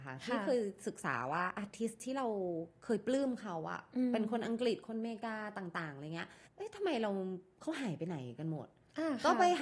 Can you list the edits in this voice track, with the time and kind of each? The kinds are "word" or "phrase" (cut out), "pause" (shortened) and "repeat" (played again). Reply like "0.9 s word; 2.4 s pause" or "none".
6.5 s pause

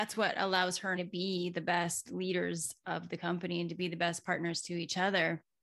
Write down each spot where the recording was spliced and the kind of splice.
1.0 s word

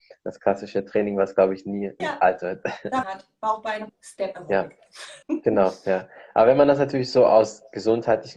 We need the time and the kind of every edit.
2.0 s word; 3.0 s phrase; 3.9 s word; 5.2 s pause

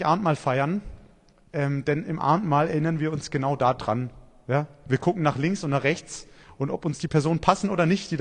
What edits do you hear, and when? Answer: none

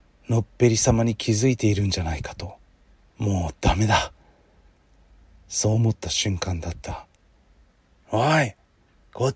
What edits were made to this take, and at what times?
2.8 s pause

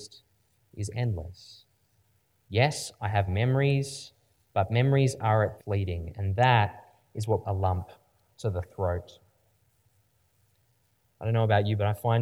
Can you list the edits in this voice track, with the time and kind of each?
3.3 s word; 5.6 s word; 7.4 s word

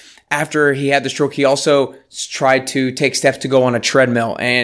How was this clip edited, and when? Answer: none

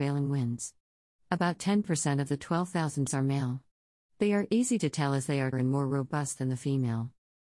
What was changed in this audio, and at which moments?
3.1 s word; 5.5 s word

